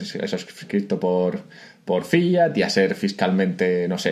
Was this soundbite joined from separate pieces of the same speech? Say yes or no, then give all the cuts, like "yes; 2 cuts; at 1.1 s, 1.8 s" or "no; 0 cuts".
no; 0 cuts